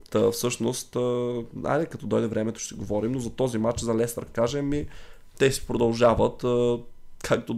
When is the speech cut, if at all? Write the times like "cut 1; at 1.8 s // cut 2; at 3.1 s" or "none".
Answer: cut 1; at 4.3 s